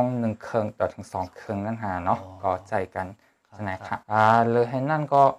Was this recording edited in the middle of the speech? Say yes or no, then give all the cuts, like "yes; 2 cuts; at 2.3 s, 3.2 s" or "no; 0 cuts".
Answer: yes; 1 cut; at 4.0 s